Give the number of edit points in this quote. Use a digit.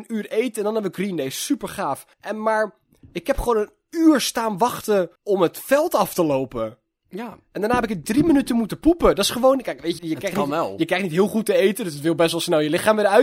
3